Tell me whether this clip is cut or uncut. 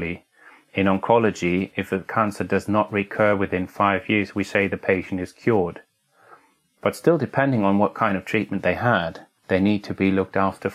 cut